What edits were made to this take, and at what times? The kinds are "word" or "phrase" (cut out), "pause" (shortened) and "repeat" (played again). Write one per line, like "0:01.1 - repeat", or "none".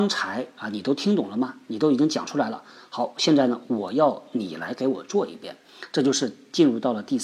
none